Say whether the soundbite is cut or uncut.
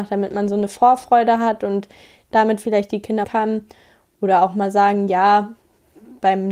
cut